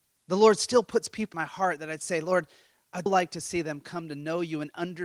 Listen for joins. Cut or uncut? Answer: cut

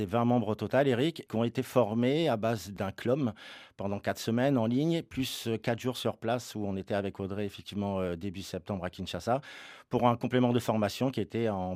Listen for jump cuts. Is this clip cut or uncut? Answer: uncut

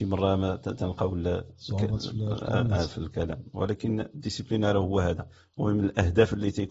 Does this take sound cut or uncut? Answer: uncut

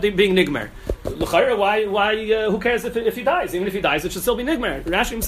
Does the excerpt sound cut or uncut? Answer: uncut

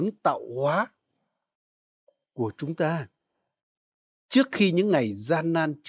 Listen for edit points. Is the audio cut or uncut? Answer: uncut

